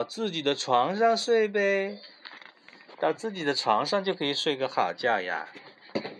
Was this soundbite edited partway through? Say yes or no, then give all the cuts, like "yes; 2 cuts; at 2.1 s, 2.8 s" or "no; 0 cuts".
no; 0 cuts